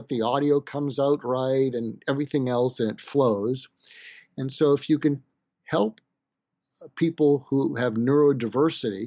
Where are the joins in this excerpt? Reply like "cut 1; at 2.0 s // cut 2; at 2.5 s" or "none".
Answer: none